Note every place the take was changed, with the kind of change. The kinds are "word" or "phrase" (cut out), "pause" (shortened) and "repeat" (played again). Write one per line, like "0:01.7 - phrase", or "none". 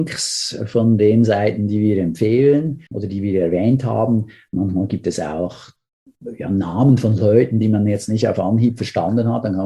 0:02.9 - pause